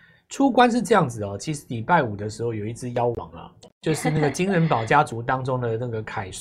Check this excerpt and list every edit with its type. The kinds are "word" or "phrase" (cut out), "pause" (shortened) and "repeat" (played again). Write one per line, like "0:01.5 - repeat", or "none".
0:03.6 - word